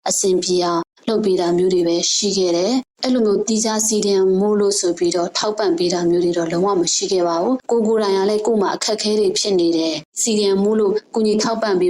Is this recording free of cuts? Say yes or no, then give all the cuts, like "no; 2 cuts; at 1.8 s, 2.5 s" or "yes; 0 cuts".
no; 1 cut; at 10.1 s